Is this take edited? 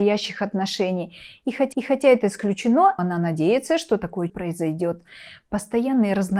yes; 3 cuts; at 1.7 s, 3.0 s, 4.3 s

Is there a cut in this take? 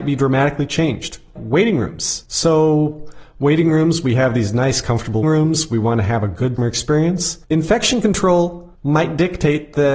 yes; 6 cuts; at 1.4 s, 2.3 s, 5.2 s, 6.6 s, 7.4 s, 8.8 s

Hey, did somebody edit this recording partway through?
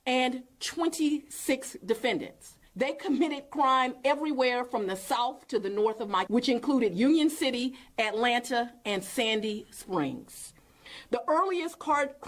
yes; 2 cuts; at 2.7 s, 6.3 s

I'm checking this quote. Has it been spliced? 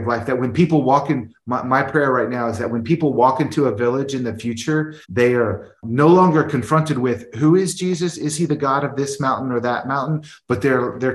yes; 1 cut; at 5.0 s

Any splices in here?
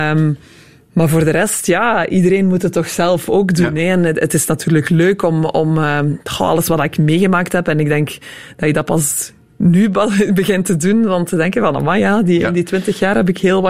no; 0 cuts

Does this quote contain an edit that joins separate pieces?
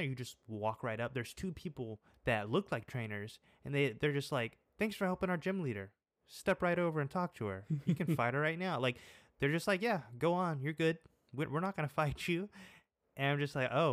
no; 0 cuts

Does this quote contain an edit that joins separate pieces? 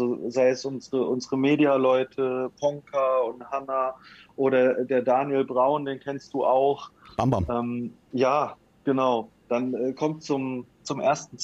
no; 0 cuts

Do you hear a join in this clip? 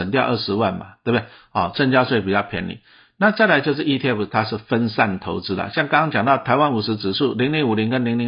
no; 0 cuts

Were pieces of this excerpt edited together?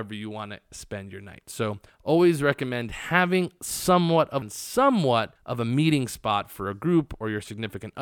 yes; 3 cuts; at 1.9 s, 4.4 s, 5.4 s

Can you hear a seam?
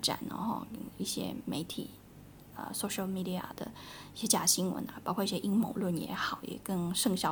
no; 0 cuts

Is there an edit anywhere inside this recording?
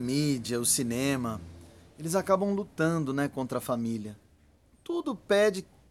no; 0 cuts

